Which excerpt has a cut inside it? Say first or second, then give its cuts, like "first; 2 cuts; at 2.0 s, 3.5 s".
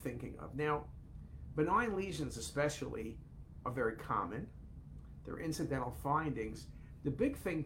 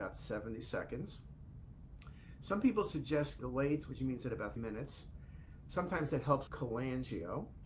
second; 4 cuts; at 3.4 s, 3.8 s, 4.6 s, 6.5 s